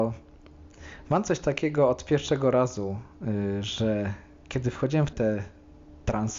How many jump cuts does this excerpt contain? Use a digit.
1